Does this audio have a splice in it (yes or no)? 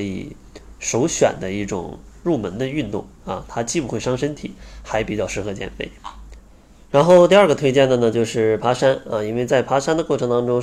no